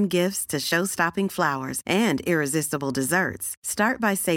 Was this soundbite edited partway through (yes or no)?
no